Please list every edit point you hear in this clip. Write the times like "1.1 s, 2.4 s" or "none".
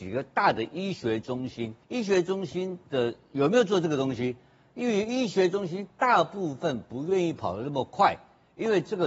1.8 s